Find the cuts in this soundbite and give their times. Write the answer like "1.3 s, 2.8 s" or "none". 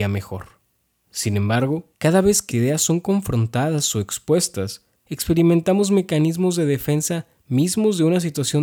2.0 s, 2.5 s, 5.0 s